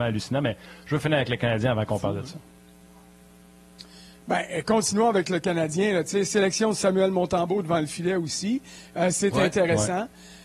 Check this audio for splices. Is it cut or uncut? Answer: uncut